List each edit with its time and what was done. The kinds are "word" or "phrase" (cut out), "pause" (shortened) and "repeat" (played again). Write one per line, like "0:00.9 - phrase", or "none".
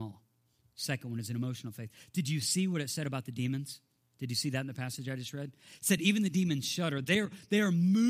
none